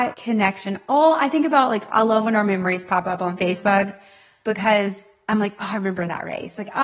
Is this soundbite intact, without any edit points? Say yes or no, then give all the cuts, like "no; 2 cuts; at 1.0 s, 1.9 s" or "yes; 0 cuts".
yes; 0 cuts